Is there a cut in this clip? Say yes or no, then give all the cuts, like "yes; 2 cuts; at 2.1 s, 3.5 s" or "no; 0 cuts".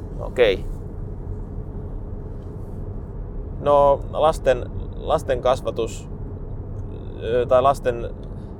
no; 0 cuts